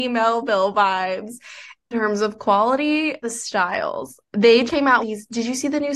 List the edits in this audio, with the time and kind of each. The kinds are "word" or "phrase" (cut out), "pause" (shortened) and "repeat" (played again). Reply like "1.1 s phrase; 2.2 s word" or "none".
1.9 s word; 3.2 s word; 4.7 s word; 5.0 s word